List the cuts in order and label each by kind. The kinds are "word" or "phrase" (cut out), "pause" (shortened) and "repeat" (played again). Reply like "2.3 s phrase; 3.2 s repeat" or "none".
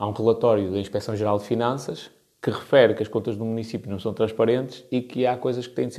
none